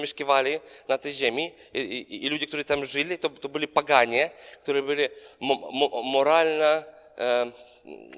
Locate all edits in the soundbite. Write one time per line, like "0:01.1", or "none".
none